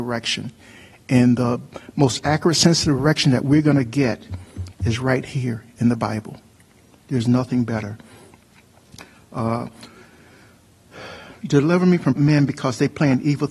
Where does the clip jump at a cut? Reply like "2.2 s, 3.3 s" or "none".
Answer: 12.2 s